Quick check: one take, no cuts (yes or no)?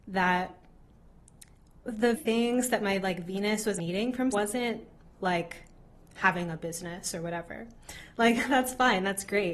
no